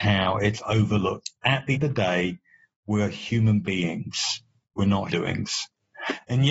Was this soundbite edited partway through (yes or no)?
yes